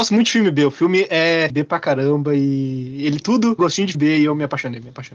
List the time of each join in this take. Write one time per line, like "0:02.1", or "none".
0:01.5
0:03.2
0:03.6
0:03.9